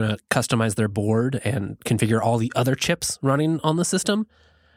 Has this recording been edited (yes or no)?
no